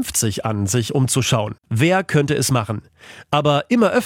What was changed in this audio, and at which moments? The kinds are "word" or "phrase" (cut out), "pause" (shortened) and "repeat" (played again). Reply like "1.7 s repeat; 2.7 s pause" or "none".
1.6 s pause

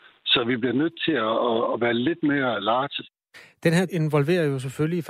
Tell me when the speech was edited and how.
3.9 s word

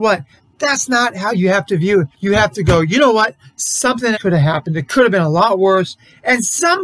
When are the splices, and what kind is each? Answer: 2.1 s pause; 4.1 s word

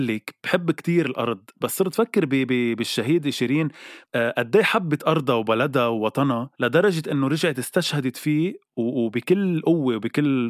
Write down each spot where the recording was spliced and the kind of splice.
4.0 s pause; 6.5 s pause

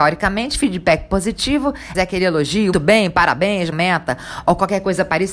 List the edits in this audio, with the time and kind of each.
1.9 s phrase; 2.7 s word; 3.7 s word

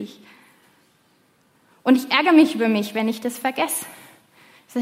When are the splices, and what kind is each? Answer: none

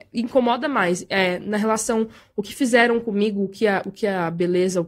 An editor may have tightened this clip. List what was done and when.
none

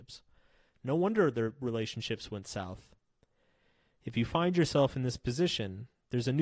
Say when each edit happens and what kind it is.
none

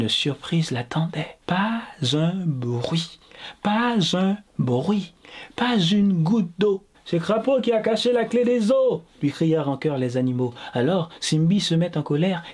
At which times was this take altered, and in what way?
1.4 s pause; 4.5 s pause; 6.9 s pause

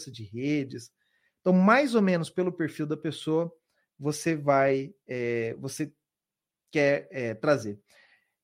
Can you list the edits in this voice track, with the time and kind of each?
none

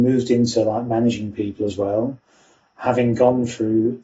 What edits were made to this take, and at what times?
none

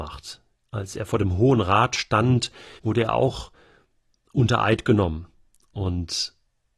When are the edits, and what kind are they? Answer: 2.8 s pause

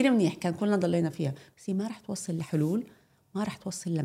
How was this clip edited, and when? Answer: none

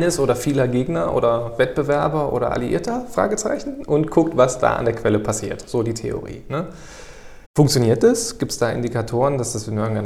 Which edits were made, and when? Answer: 7.4 s pause

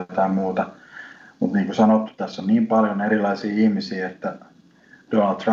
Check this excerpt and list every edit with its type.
none

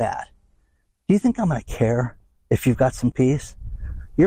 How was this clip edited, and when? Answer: 2.3 s pause; 3.1 s word

